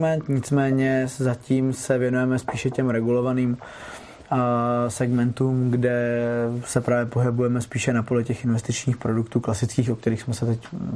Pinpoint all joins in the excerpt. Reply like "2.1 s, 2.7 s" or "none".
none